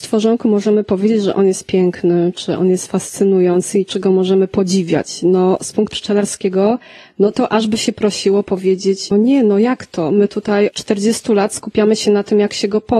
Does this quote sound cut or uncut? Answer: cut